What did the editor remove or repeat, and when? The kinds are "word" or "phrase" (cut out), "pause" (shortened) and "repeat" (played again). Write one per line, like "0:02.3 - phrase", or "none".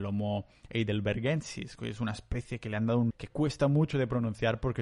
0:03.1 - word